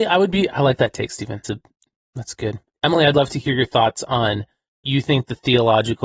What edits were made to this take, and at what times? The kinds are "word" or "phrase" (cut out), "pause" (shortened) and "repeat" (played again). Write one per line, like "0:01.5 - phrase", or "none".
0:01.4 - word
0:02.7 - word
0:03.1 - word
0:04.8 - word

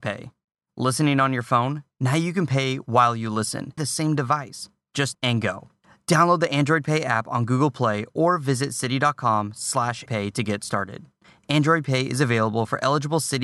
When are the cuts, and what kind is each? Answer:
0:03.8 - word
0:05.1 - word
0:10.1 - word

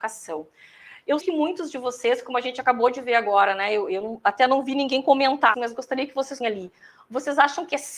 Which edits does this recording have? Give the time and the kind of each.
0:01.2 - word
0:05.5 - word
0:06.4 - word

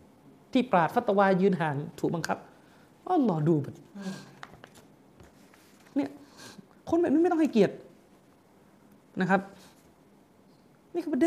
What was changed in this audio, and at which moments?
none

